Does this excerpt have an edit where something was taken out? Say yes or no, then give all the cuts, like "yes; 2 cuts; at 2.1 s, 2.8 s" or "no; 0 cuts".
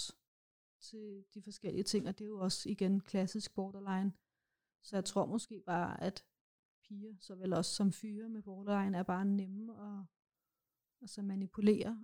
no; 0 cuts